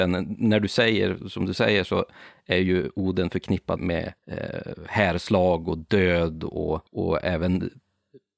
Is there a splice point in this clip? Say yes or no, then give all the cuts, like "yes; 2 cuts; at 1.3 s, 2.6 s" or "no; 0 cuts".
yes; 3 cuts; at 3.8 s, 4.2 s, 6.9 s